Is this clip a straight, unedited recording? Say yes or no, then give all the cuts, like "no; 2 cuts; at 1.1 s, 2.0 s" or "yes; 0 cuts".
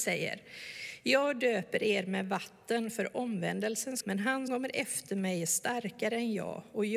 no; 2 cuts; at 4.0 s, 4.5 s